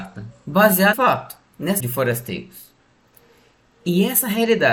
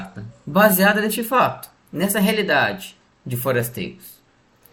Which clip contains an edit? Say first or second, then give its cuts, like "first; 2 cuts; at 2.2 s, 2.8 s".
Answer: first; 2 cuts; at 0.9 s, 1.8 s